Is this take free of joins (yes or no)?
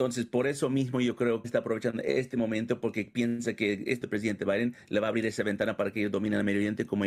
no